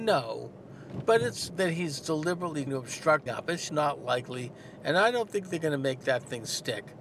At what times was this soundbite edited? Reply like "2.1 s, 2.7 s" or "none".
1.5 s, 2.7 s, 3.3 s, 3.7 s